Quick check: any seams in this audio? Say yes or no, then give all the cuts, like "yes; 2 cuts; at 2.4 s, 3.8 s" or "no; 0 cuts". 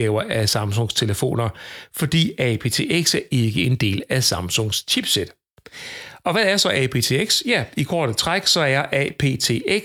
no; 0 cuts